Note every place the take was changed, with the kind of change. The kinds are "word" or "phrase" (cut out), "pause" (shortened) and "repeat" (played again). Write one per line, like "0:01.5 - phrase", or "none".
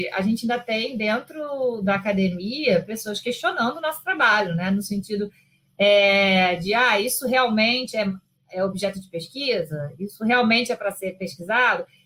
none